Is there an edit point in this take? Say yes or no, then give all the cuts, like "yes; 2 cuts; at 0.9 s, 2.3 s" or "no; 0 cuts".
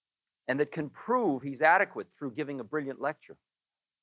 no; 0 cuts